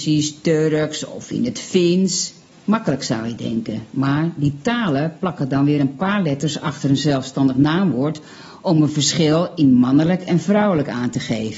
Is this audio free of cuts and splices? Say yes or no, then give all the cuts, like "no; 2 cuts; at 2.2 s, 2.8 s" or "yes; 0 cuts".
no; 1 cut; at 2.5 s